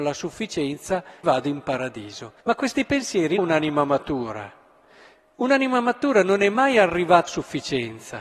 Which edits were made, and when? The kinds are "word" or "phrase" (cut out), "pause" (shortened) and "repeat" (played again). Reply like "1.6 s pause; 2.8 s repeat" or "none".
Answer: 1.2 s word; 2.4 s pause; 3.4 s phrase; 7.3 s word